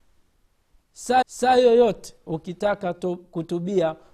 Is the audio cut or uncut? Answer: cut